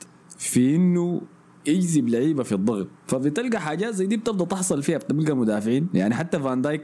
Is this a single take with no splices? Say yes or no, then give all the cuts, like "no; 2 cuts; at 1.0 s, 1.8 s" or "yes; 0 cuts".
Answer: no; 1 cut; at 3.0 s